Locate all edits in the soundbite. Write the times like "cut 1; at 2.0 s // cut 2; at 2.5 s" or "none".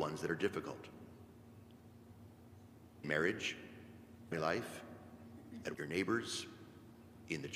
cut 1; at 3.0 s // cut 2; at 4.3 s // cut 3; at 5.7 s